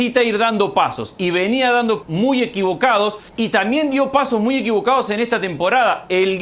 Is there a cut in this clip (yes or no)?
yes